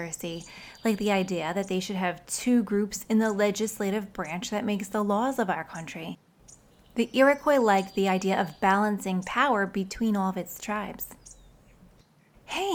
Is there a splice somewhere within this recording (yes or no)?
no